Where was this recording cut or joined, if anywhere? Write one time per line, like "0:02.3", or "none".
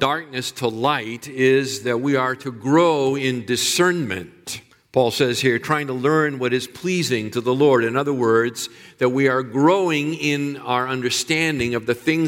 0:04.7

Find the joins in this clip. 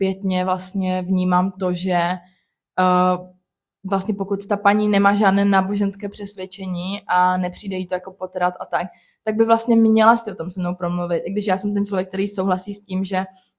none

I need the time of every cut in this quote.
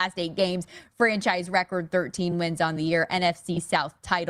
none

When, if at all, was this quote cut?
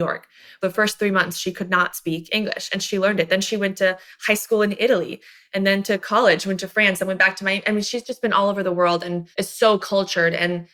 0:09.3

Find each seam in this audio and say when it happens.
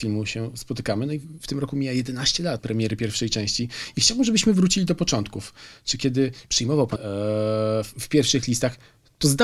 0:02.6
0:07.0

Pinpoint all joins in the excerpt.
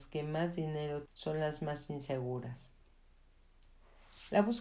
0:01.1

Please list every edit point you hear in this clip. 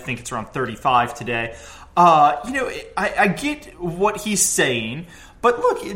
none

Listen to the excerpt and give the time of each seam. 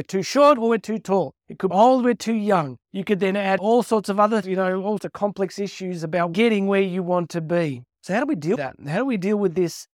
0:01.4
0:01.7
0:02.8
0:03.6
0:04.4
0:05.0
0:06.3
0:08.6

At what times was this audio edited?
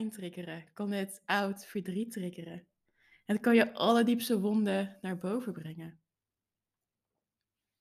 none

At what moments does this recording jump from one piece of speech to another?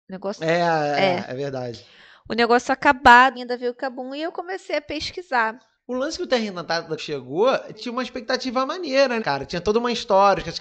0:03.3
0:07.0
0:07.7
0:09.2

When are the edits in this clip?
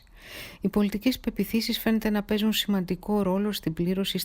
none

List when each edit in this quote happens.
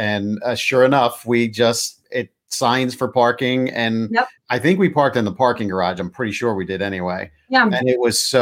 0:04.4

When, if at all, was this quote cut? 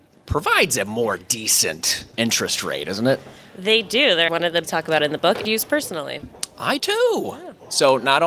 0:02.1
0:04.3
0:04.6
0:05.4
0:06.8

